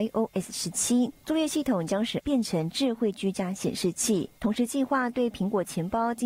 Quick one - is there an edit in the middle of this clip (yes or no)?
yes